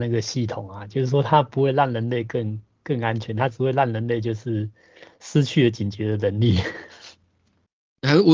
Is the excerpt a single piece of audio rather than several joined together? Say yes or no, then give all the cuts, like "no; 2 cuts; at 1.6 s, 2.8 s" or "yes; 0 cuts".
yes; 0 cuts